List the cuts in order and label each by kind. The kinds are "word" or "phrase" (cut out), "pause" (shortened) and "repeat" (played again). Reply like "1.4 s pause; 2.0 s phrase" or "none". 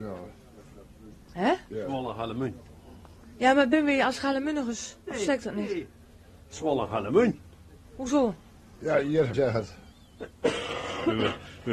5.0 s pause; 9.3 s phrase